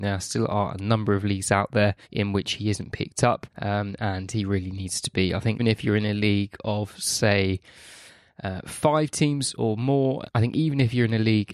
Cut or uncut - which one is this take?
cut